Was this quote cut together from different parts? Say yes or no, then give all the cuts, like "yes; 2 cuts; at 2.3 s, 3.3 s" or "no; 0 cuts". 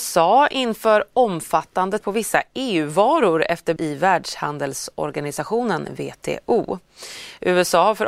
yes; 2 cuts; at 2.0 s, 3.8 s